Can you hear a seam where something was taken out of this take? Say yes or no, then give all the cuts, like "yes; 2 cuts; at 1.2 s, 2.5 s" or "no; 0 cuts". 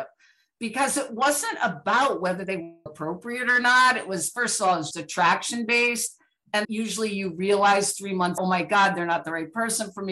yes; 4 cuts; at 2.9 s, 4.9 s, 6.6 s, 8.4 s